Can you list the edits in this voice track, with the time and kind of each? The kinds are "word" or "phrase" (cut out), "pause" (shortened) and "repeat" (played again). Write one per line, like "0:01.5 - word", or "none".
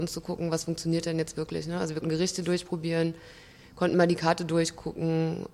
0:02.0 - word